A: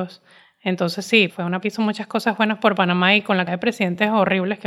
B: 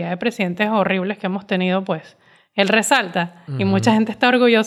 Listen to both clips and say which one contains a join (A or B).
A